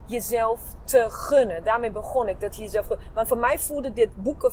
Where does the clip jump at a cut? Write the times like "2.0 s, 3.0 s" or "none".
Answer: none